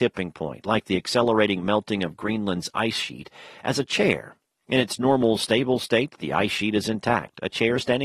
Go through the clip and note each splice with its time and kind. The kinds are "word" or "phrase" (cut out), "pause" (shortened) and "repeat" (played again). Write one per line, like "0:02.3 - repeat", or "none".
none